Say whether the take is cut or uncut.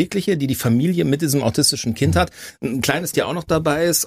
cut